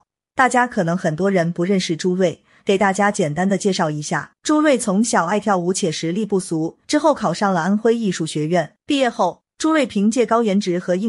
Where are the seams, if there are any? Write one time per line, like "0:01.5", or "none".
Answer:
0:04.4
0:06.8
0:08.8